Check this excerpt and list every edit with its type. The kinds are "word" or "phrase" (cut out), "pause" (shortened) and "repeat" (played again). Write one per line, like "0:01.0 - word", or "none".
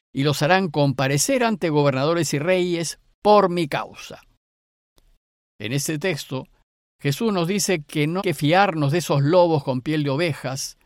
0:08.2 - word